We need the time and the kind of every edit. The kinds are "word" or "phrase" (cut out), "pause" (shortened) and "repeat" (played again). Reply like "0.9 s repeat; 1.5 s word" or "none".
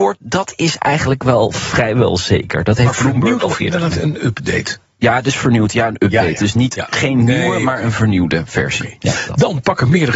none